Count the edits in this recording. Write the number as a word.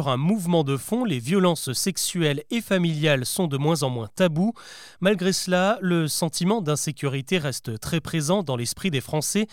zero